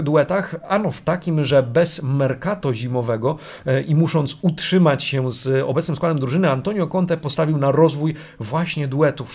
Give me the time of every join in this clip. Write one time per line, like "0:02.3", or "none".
none